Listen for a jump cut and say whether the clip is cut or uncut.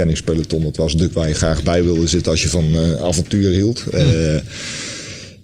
cut